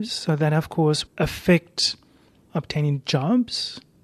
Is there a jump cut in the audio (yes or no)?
yes